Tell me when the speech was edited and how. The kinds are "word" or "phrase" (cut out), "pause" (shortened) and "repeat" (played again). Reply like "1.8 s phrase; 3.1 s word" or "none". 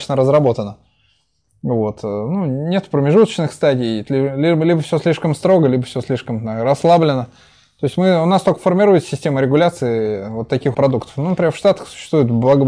4.1 s word; 10.7 s word